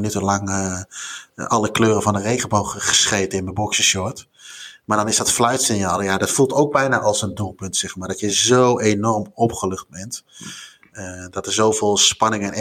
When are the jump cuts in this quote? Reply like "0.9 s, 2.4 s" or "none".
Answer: none